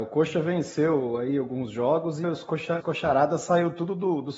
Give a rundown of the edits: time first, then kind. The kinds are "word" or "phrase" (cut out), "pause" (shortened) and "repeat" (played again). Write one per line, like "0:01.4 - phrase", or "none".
0:02.2 - word
0:02.8 - word